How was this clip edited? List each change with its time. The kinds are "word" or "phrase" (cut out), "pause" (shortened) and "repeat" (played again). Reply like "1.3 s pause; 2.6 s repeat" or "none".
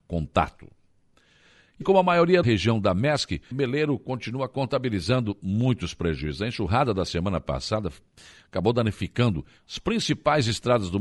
1.8 s word; 2.4 s phrase; 3.5 s word